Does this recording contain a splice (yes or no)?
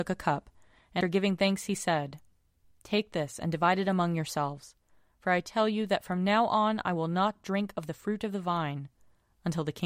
yes